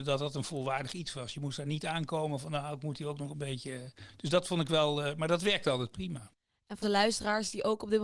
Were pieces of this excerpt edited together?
yes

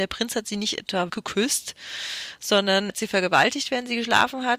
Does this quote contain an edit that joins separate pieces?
yes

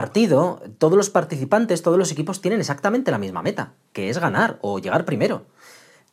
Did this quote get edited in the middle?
no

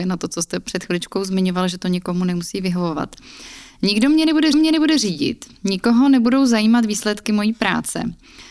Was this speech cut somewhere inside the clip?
yes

